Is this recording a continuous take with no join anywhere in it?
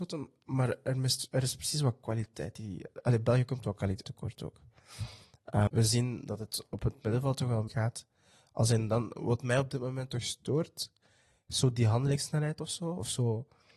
no; 3 cuts; at 4.0 s, 5.7 s, 7.7 s

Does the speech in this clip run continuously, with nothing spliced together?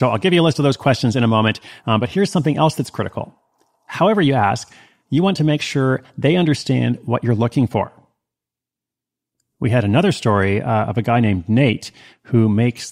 yes; 0 cuts

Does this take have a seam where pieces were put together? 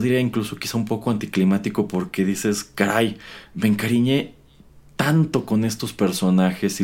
no; 0 cuts

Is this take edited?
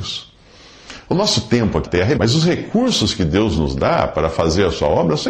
yes; 2 cuts; at 1.8 s, 2.1 s

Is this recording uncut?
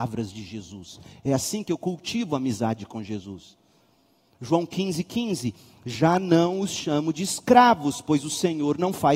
yes; 0 cuts

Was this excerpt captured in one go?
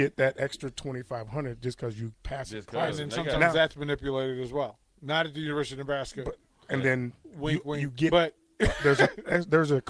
yes; 0 cuts

